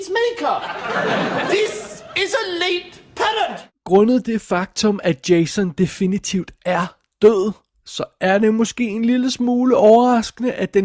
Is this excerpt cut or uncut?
uncut